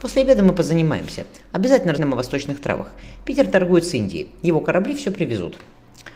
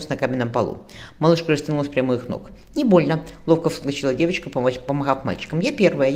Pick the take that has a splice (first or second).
first